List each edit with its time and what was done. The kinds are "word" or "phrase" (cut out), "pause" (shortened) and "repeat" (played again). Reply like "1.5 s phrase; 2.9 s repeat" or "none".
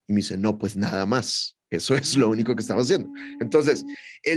none